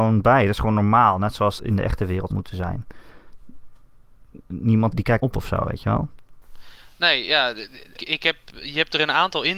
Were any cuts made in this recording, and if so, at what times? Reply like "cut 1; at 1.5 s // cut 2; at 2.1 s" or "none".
cut 1; at 1.6 s // cut 2; at 2.3 s // cut 3; at 4.9 s // cut 4; at 5.2 s // cut 5; at 8.0 s